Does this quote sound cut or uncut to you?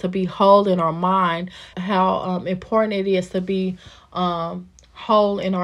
cut